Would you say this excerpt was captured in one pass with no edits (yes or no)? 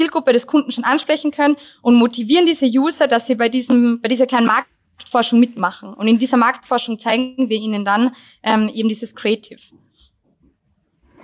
yes